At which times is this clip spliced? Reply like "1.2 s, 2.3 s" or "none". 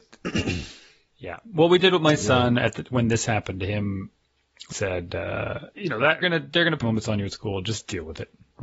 4.7 s, 5.7 s, 6.2 s, 6.8 s